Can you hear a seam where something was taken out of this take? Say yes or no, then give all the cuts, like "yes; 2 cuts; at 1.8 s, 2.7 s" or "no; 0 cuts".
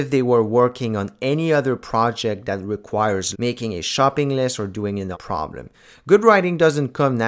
yes; 2 cuts; at 3.3 s, 5.1 s